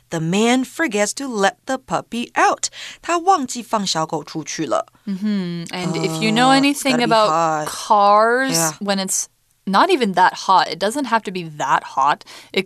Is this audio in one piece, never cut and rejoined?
yes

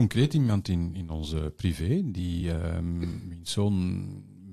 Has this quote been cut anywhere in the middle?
no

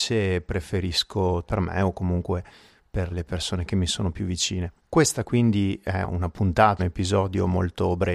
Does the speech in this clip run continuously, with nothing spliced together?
no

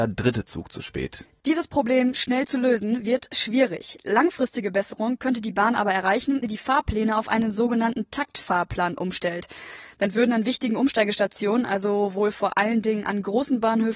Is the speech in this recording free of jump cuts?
no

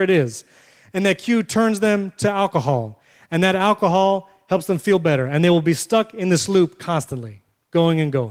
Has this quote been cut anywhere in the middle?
no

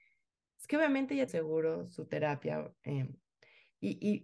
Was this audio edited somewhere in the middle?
yes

